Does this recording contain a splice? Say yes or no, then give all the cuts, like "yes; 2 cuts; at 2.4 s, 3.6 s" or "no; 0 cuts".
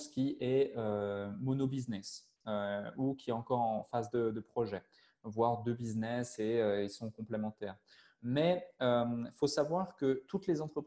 no; 0 cuts